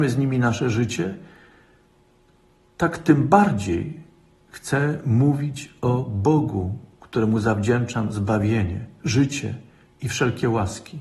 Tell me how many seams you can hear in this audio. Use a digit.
0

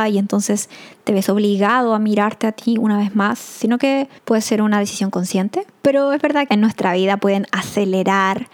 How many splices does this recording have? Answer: 2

